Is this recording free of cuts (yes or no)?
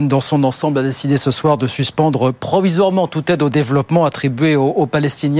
yes